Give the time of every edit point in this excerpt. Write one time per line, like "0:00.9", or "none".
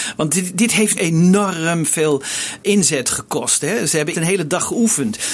0:01.0
0:04.1